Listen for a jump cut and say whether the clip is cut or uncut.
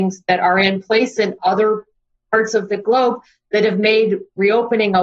uncut